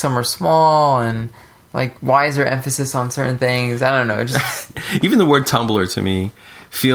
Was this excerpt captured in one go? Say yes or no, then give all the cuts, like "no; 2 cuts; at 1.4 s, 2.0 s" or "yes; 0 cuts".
yes; 0 cuts